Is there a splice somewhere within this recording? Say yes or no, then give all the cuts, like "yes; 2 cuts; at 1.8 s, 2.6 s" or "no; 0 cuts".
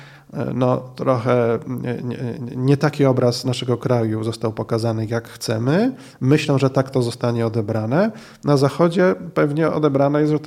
no; 0 cuts